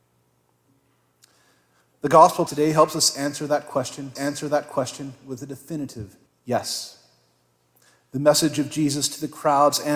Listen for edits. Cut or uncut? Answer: cut